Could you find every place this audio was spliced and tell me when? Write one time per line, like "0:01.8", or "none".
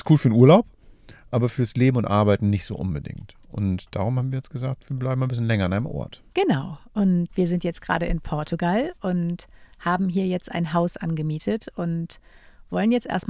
0:04.8
0:06.3
0:07.3